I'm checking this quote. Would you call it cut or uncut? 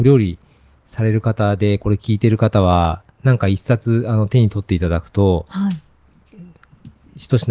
cut